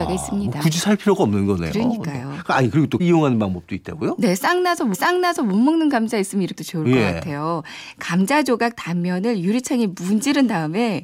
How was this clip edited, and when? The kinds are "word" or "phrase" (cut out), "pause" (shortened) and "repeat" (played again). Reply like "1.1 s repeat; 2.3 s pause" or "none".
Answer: 3.0 s word; 4.9 s repeat; 6.6 s phrase